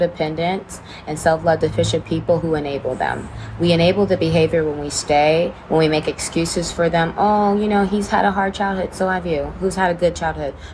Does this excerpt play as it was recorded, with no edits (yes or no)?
yes